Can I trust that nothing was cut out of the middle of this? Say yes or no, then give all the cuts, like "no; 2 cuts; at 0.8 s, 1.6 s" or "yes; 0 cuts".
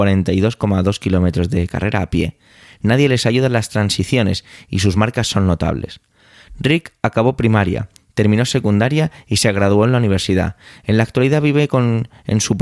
yes; 0 cuts